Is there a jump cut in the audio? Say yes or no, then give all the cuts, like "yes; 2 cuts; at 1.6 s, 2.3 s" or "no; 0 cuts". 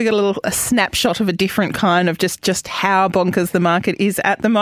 no; 0 cuts